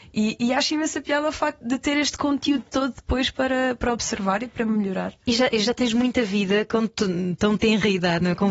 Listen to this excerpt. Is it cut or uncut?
cut